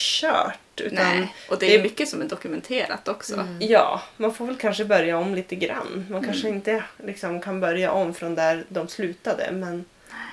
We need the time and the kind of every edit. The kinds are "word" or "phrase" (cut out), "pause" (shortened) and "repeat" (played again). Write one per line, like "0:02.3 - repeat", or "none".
0:07.0 - pause